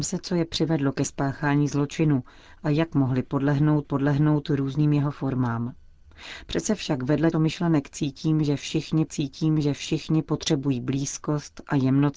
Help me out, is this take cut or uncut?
cut